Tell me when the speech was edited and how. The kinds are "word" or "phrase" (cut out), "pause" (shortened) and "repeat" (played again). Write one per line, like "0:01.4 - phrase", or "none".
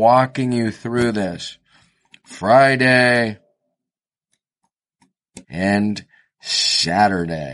0:05.4 - pause